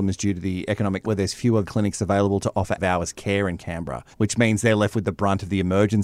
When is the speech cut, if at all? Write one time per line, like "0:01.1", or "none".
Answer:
0:01.0
0:01.6
0:02.8
0:04.1